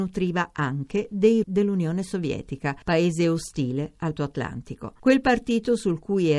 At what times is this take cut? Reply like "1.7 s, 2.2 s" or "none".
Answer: 1.4 s, 4.2 s

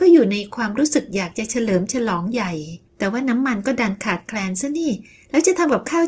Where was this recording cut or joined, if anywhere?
2.9 s

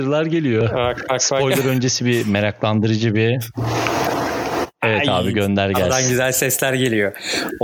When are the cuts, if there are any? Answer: none

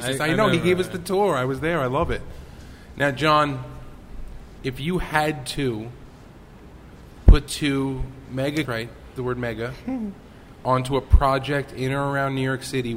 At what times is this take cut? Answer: 7.5 s, 8.6 s, 9.2 s

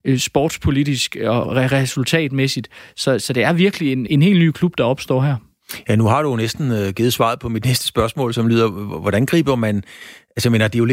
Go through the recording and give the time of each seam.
1.4 s, 4.1 s

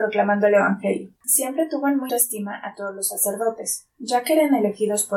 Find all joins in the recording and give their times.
1.2 s, 2.1 s

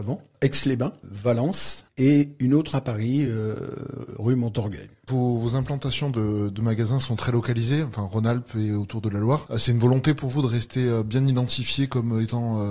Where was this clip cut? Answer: none

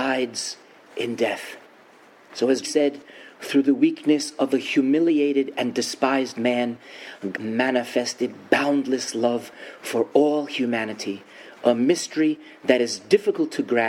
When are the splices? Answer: 2.6 s, 7.3 s

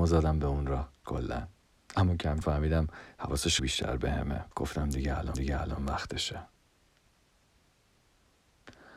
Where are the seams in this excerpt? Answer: 1.0 s, 1.7 s, 2.4 s, 3.6 s, 4.5 s, 5.3 s

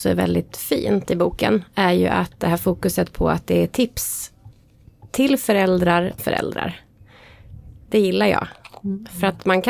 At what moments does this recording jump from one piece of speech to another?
6.2 s

